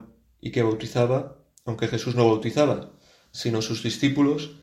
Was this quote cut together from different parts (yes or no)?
no